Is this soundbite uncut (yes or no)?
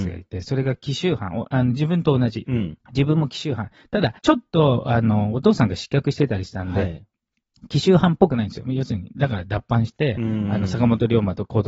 no